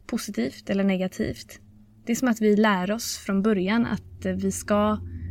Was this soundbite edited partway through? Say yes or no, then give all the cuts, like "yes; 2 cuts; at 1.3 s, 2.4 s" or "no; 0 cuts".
no; 0 cuts